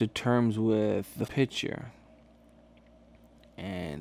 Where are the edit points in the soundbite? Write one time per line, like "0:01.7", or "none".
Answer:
0:01.3